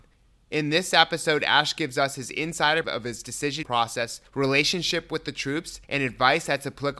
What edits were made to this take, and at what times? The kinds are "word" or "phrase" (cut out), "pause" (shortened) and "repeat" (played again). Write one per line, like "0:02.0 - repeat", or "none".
0:02.8 - word
0:03.6 - word
0:04.3 - pause
0:05.8 - pause